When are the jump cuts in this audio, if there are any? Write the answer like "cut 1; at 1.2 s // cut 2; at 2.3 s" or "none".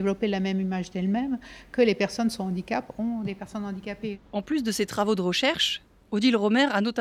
cut 1; at 4.3 s